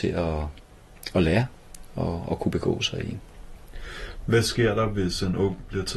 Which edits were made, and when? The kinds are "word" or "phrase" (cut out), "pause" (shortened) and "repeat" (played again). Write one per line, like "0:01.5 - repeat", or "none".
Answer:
none